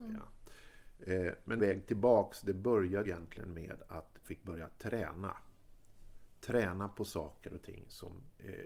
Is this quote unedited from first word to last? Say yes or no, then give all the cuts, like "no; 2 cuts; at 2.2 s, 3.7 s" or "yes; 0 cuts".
no; 3 cuts; at 1.6 s, 3.0 s, 4.2 s